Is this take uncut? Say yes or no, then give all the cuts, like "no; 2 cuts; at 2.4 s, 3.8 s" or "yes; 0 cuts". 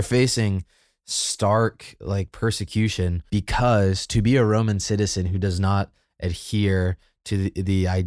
no; 1 cut; at 3.3 s